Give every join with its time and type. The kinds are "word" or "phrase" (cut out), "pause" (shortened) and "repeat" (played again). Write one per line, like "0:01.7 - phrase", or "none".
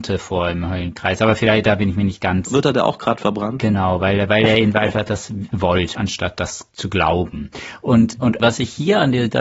0:05.5 - word
0:05.9 - word
0:06.7 - pause